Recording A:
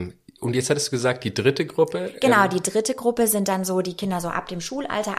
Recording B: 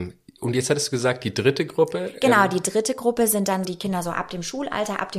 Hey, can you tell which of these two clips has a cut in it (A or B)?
B